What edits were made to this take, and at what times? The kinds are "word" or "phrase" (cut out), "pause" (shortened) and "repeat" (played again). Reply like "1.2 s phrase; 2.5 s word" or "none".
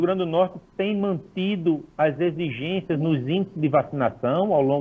none